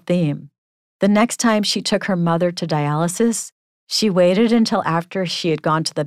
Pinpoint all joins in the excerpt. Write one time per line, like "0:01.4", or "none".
none